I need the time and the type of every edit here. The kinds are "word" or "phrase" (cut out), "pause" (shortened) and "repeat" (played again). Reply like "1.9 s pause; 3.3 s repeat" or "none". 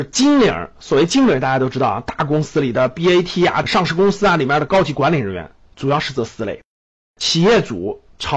none